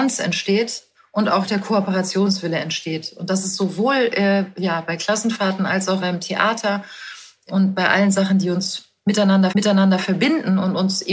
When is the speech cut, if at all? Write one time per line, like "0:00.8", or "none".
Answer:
0:00.9
0:06.0
0:09.5